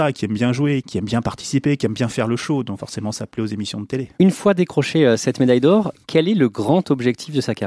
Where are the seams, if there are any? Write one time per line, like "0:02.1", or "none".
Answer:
0:04.1